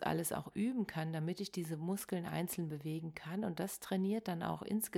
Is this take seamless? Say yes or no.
yes